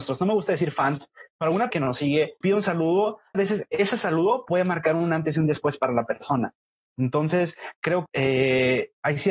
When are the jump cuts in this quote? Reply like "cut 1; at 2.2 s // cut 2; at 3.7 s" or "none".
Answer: cut 1; at 1.7 s // cut 2; at 2.4 s // cut 3; at 3.3 s // cut 4; at 8.1 s